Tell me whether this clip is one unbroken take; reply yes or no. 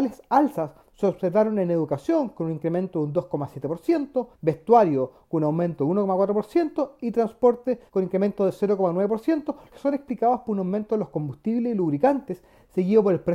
no